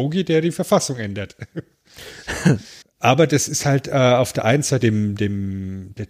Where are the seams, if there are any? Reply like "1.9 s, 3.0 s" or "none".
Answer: 2.8 s, 4.8 s